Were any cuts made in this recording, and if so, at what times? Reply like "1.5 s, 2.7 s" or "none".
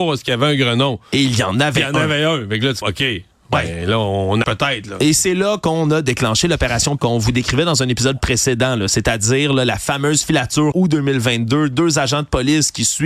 2.8 s, 4.4 s, 7.0 s, 10.7 s